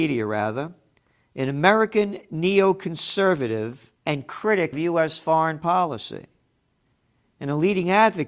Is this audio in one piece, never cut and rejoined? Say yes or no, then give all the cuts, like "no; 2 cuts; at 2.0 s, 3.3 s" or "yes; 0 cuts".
no; 2 cuts; at 4.0 s, 4.7 s